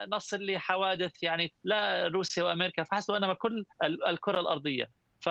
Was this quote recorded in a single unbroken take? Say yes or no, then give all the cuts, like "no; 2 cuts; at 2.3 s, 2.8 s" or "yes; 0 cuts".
no; 2 cuts; at 1.5 s, 3.7 s